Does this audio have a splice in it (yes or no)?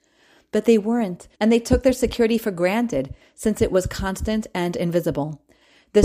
yes